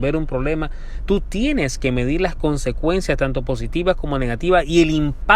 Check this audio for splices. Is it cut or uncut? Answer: uncut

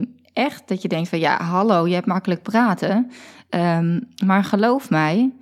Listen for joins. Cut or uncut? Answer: uncut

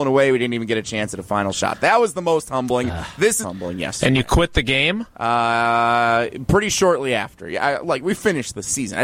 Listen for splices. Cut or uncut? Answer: cut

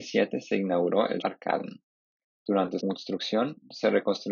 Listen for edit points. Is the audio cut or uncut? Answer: cut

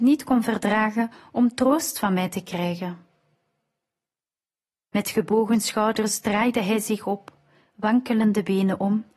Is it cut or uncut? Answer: uncut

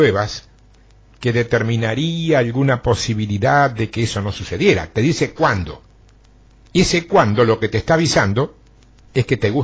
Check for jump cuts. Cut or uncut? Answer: cut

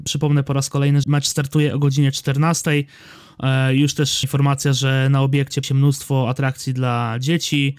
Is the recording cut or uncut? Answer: cut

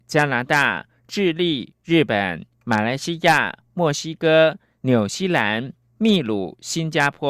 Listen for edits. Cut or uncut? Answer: uncut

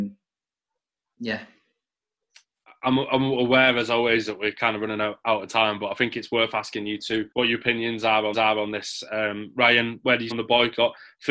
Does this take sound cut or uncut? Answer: cut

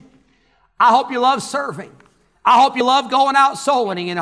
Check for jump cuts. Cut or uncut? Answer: uncut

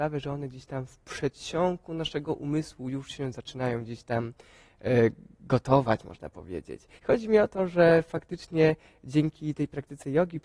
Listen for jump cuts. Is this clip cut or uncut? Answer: cut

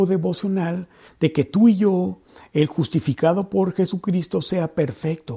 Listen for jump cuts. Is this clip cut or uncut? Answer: uncut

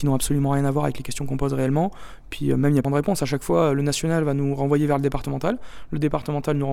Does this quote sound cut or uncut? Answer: cut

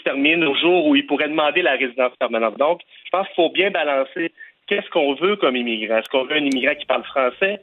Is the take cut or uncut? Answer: uncut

